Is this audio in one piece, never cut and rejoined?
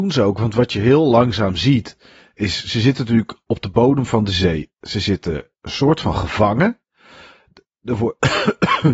yes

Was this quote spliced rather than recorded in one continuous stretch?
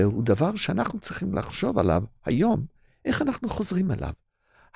no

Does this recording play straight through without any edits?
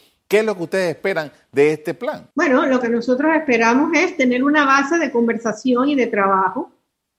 no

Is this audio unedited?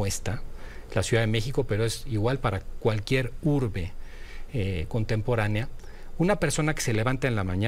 yes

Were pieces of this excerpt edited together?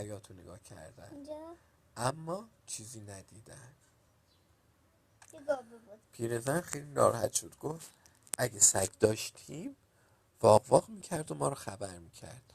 yes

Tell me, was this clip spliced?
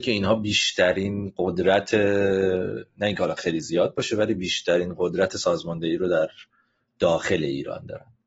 no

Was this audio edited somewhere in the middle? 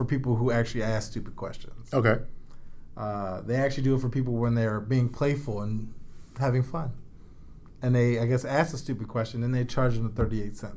no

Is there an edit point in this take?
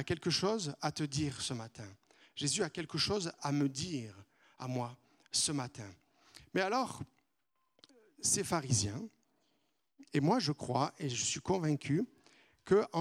no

